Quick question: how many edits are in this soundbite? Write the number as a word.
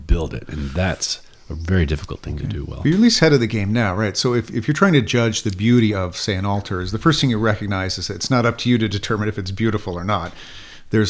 zero